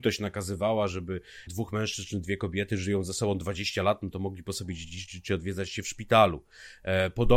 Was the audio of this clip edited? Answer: yes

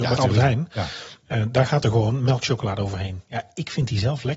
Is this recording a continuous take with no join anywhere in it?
yes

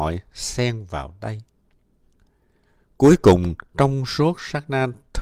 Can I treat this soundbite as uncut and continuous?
yes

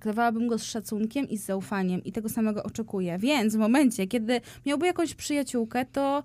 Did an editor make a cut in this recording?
no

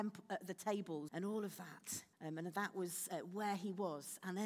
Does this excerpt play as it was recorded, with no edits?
no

